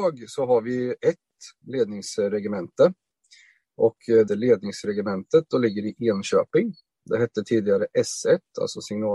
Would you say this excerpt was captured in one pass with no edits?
no; 1 cut; at 4.3 s

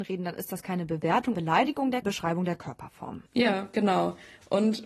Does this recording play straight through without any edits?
no; 3 cuts; at 1.3 s, 2.0 s, 3.3 s

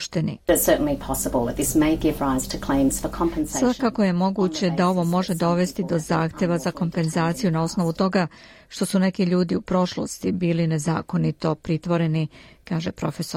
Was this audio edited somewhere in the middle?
no; 0 cuts

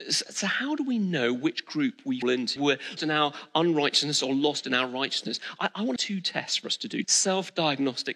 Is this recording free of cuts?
no; 5 cuts; at 2.2 s, 2.6 s, 3.0 s, 6.0 s, 7.0 s

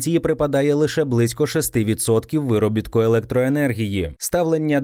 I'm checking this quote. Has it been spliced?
no; 0 cuts

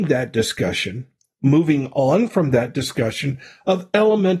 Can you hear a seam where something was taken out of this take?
no; 0 cuts

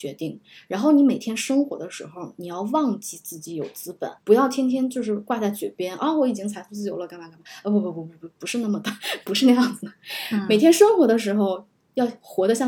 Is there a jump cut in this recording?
yes; 1 cut; at 4.2 s

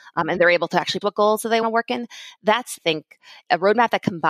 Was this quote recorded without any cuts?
no; 3 cuts; at 1.0 s, 1.6 s, 2.8 s

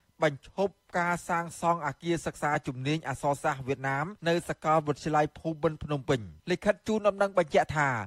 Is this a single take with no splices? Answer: no; 2 cuts; at 4.2 s, 6.4 s

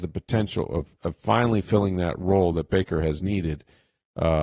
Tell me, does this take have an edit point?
no; 0 cuts

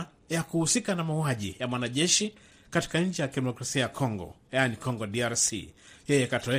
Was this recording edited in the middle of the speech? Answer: no; 0 cuts

